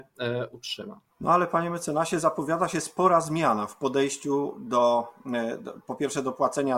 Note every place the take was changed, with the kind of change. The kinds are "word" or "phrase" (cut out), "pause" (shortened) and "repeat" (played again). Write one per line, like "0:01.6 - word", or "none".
0:01.1 - pause